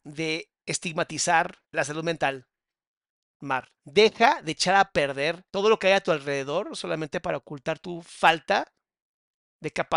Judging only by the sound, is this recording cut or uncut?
cut